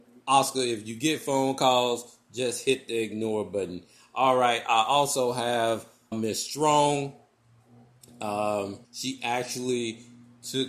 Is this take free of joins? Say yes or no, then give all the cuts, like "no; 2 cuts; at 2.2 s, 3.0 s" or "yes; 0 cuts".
no; 2 cuts; at 6.1 s, 8.8 s